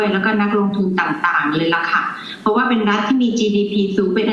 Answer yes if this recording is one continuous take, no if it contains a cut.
yes